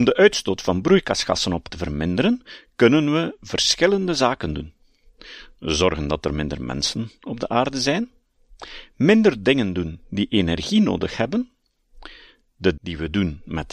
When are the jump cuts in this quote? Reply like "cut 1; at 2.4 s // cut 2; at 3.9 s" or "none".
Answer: cut 1; at 1.7 s // cut 2; at 12.8 s